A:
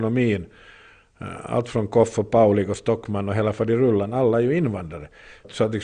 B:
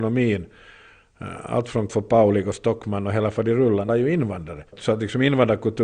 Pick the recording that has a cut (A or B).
B